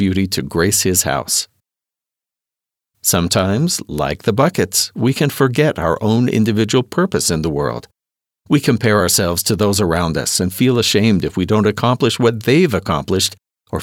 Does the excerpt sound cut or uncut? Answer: uncut